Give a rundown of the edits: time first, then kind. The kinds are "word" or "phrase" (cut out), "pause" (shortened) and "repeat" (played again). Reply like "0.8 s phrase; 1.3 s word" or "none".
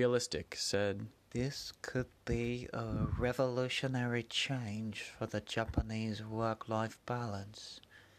1.2 s pause